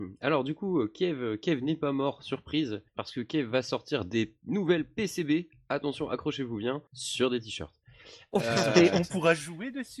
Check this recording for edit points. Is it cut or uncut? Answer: cut